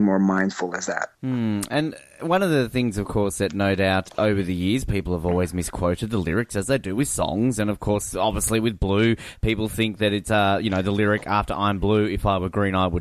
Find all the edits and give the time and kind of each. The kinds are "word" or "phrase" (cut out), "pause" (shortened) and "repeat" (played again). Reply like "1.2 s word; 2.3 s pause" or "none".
4.1 s word

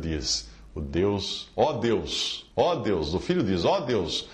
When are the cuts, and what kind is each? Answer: 2.5 s pause

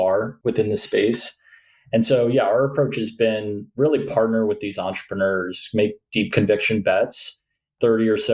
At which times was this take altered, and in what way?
none

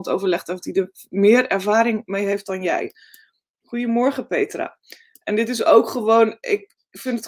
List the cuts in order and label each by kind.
none

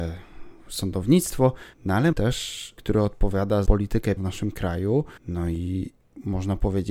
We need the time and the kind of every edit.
1.7 s pause; 2.1 s word; 2.8 s phrase; 3.7 s word; 4.2 s word; 5.2 s pause

